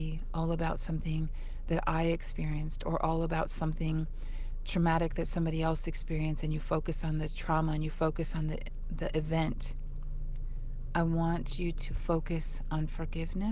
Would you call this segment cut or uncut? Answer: uncut